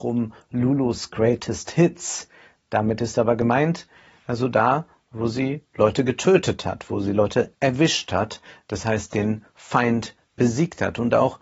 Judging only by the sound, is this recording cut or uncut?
uncut